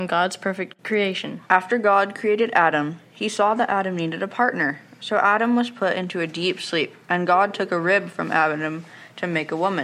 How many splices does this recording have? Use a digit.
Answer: 1